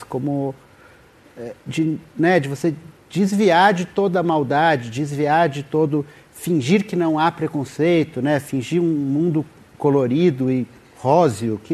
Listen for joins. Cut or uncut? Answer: uncut